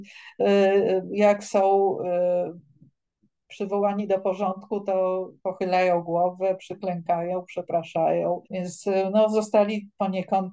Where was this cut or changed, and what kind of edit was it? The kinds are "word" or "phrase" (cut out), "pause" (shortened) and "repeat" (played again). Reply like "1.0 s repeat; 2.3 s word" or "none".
8.4 s pause